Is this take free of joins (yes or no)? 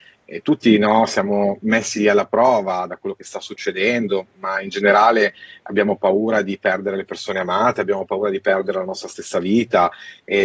yes